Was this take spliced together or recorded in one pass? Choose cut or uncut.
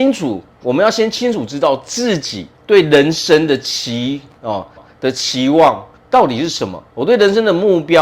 cut